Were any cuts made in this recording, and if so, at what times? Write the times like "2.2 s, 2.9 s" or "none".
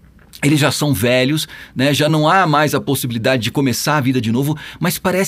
none